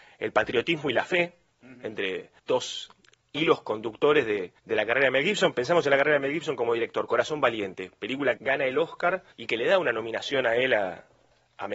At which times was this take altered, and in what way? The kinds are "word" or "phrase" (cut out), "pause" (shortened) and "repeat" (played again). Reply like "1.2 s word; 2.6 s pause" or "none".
2.4 s pause; 4.6 s pause; 8.4 s word; 9.3 s pause